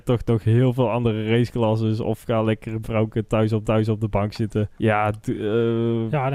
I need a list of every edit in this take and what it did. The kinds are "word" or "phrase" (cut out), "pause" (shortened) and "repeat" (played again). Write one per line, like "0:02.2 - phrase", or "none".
0:02.8 - word
0:03.6 - repeat
0:04.7 - pause

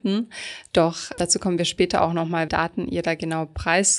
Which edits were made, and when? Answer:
0:01.2 - word
0:02.5 - word

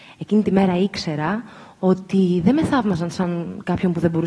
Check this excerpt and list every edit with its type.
none

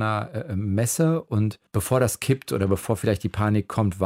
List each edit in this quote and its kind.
0:01.7 - pause

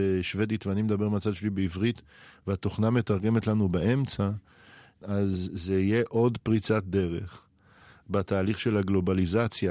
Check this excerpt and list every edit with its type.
none

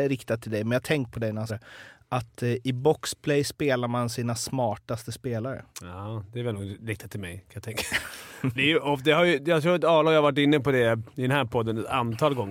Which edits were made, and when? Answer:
0:01.1 - word
0:01.5 - word
0:05.7 - pause
0:08.6 - word

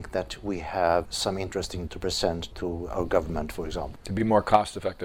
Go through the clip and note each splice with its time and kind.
0:01.1 - word
0:01.9 - word
0:02.5 - word

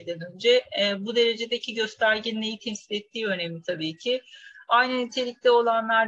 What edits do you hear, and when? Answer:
none

